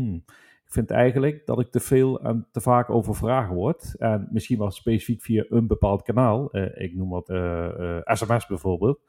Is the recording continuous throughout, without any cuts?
no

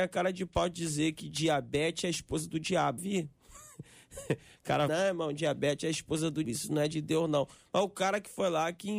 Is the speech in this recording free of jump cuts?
no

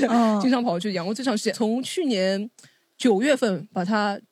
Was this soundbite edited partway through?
yes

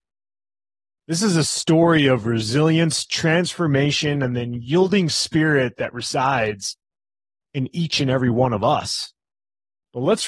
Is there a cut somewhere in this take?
no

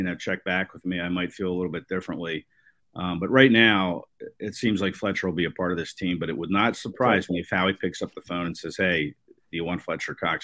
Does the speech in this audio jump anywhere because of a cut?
no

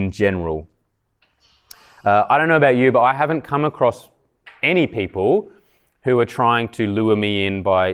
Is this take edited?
no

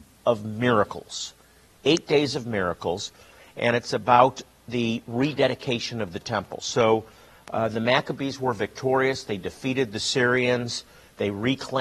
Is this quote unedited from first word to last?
yes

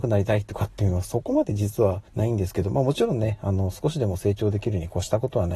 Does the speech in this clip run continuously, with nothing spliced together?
no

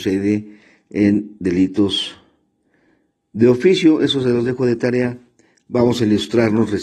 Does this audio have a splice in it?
no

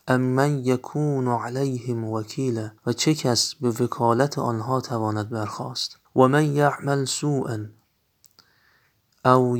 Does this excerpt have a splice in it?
yes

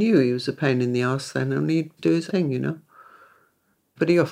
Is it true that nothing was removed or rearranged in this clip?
no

